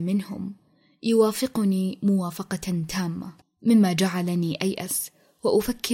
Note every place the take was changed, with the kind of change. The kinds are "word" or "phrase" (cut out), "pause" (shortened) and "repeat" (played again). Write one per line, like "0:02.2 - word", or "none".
0:03.4 - pause